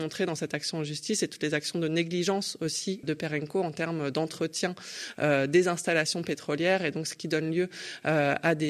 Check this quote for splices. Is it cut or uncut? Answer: cut